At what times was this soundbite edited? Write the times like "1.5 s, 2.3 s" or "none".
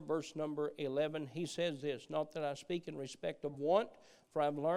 none